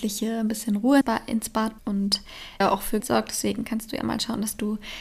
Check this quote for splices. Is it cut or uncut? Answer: cut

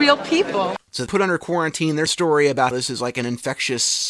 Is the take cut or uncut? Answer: cut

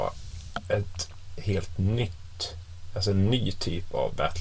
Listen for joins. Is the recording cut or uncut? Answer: uncut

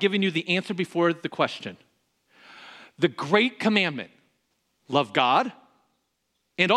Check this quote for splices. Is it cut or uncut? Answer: uncut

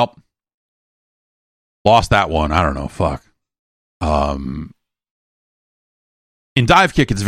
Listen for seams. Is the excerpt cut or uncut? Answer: cut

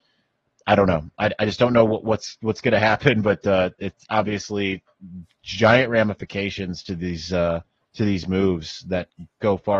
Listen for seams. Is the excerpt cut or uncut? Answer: uncut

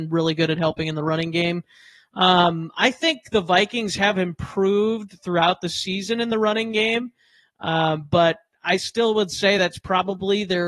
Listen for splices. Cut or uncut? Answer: uncut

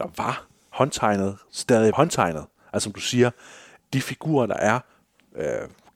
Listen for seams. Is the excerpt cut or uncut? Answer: cut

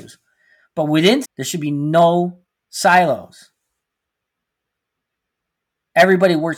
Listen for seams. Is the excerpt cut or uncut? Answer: cut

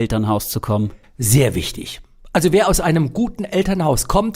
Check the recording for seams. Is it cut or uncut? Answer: uncut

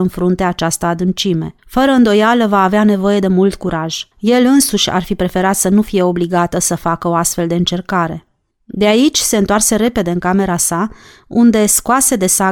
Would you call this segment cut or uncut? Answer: cut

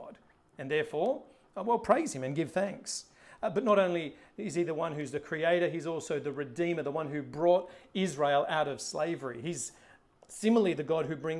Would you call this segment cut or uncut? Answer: uncut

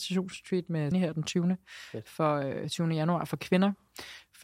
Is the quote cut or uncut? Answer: cut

